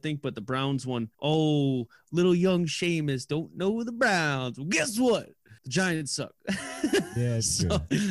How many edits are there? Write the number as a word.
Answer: two